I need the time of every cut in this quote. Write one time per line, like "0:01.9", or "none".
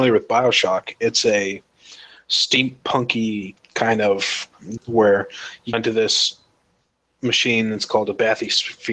0:03.6
0:04.8
0:05.7